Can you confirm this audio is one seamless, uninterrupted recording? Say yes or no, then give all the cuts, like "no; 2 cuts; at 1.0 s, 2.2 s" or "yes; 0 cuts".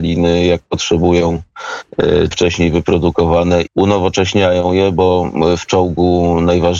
no; 2 cuts; at 2.3 s, 3.7 s